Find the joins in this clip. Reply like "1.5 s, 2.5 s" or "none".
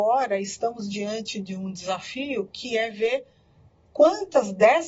none